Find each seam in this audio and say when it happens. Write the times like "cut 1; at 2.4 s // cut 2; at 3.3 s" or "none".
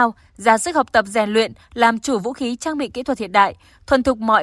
none